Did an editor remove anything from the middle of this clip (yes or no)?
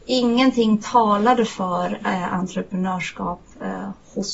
no